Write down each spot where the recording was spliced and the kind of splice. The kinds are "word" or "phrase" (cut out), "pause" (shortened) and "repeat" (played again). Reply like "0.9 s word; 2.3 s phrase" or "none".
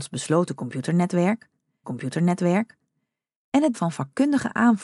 1.8 s repeat; 3.7 s word